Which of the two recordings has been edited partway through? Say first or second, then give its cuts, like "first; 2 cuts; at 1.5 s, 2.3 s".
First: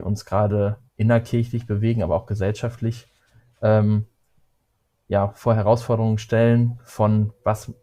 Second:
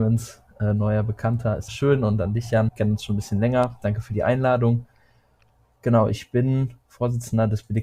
second; 2 cuts; at 1.7 s, 2.7 s